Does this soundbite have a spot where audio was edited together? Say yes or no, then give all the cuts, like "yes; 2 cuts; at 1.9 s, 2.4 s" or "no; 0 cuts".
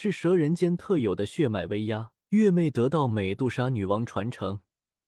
yes; 1 cut; at 2.2 s